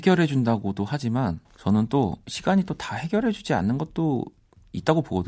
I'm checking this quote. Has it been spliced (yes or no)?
yes